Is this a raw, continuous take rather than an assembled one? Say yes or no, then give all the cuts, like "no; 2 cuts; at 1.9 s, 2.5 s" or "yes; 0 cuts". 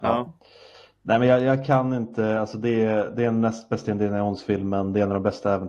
yes; 0 cuts